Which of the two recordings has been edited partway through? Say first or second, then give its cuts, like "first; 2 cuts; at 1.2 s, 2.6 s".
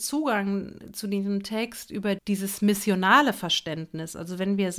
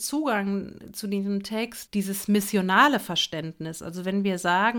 second; 1 cut; at 1.9 s